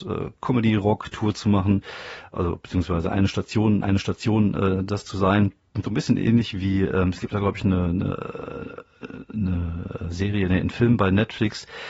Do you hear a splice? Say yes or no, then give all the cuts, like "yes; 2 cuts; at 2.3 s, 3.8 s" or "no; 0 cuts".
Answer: yes; 1 cut; at 3.8 s